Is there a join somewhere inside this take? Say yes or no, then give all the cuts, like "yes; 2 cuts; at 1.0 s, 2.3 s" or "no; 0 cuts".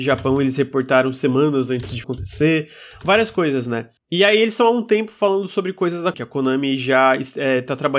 yes; 2 cuts; at 2.0 s, 6.1 s